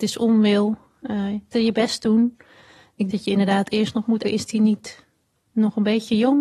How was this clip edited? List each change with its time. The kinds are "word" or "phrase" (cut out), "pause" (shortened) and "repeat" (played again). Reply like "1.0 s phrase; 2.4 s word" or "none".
1.5 s word; 3.1 s word; 4.2 s word